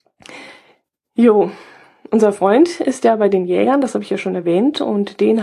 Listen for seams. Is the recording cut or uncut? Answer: uncut